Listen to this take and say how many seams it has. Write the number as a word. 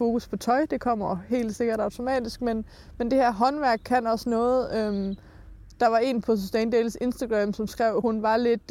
one